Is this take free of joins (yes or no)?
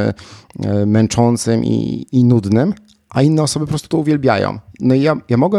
yes